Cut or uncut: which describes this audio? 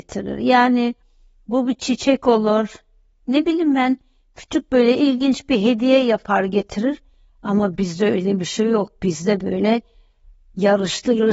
uncut